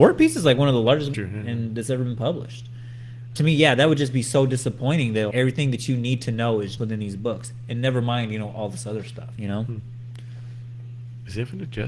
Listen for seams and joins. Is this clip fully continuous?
no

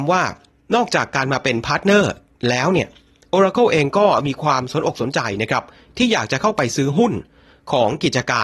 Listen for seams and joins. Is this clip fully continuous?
yes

